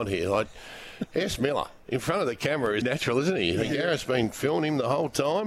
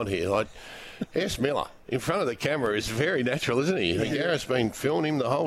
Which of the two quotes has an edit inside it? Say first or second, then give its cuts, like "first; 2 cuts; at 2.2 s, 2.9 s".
first; 1 cut; at 2.8 s